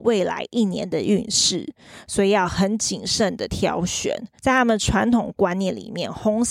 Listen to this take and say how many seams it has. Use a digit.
1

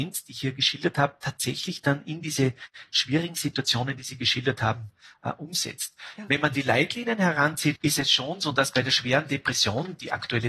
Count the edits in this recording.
1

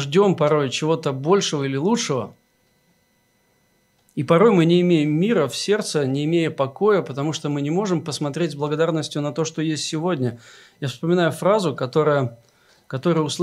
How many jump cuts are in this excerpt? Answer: 0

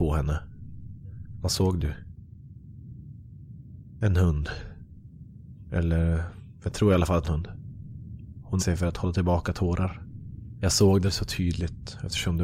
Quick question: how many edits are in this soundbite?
3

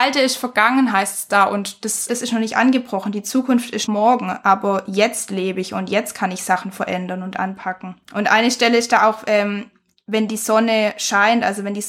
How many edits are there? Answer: 3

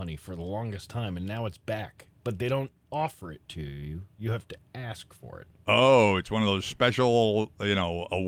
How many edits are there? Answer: 0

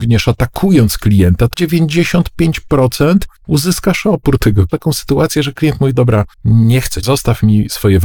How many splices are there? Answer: 6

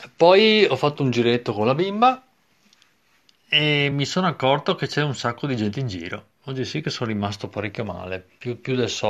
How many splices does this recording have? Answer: 0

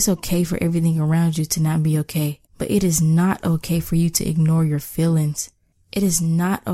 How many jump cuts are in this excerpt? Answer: 2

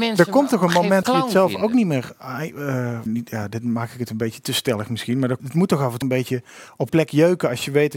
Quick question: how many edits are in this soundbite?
5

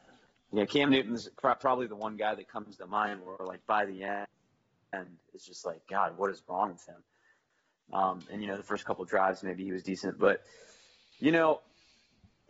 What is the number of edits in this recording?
0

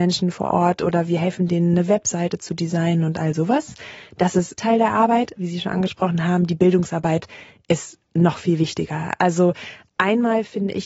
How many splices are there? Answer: 2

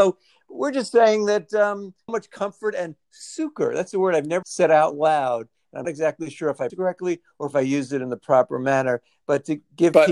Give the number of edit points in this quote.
4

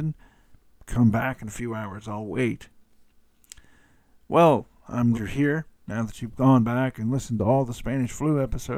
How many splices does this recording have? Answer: 2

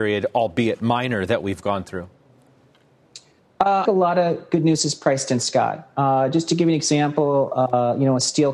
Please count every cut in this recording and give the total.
1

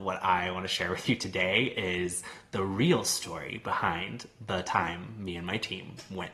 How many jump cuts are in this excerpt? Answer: 0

